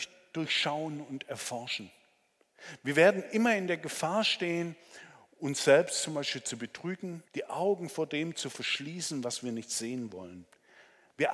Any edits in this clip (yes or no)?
yes